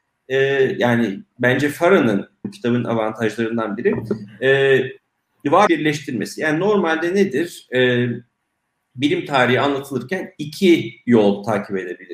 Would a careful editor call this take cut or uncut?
cut